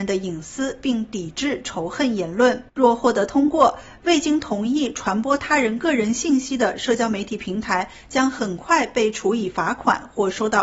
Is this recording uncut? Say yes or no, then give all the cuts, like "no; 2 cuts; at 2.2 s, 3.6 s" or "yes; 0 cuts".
no; 1 cut; at 2.7 s